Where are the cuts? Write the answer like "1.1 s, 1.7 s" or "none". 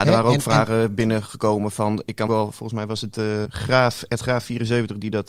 2.3 s, 3.4 s